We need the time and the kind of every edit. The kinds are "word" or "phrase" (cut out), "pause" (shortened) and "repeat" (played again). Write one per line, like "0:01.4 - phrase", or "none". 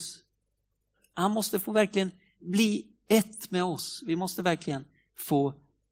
none